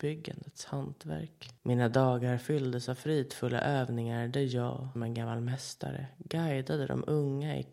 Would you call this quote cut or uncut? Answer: cut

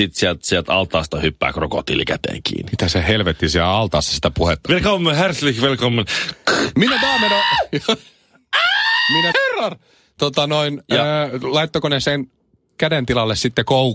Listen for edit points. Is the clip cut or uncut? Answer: cut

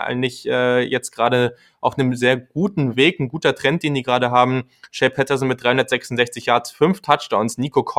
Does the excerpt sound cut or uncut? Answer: uncut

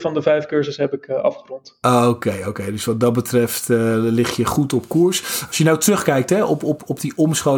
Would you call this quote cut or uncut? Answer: uncut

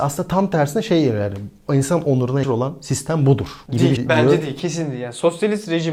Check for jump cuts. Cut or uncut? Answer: cut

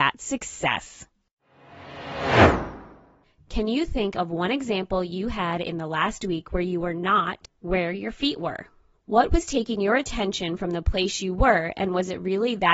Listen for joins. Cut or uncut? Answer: uncut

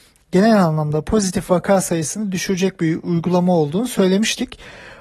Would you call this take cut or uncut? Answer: uncut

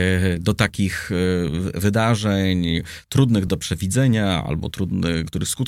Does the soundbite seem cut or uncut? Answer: uncut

